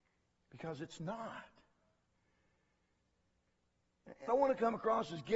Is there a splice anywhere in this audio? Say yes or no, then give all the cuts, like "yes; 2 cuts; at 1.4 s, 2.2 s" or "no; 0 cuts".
yes; 1 cut; at 4.3 s